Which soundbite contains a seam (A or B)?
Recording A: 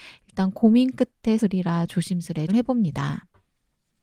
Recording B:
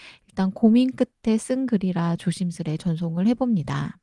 A